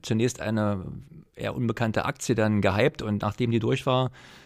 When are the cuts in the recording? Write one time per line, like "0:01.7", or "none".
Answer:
none